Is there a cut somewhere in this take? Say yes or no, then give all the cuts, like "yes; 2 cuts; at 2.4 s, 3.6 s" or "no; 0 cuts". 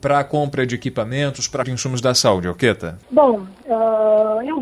yes; 2 cuts; at 1.6 s, 3.0 s